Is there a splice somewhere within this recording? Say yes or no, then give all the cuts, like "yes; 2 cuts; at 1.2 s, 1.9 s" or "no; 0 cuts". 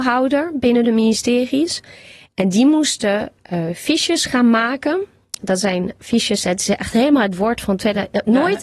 no; 0 cuts